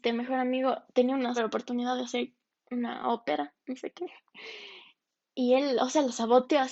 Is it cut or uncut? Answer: cut